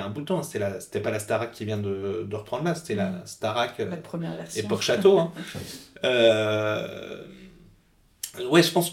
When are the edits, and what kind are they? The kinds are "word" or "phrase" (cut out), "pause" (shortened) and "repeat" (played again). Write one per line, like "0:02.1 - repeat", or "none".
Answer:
none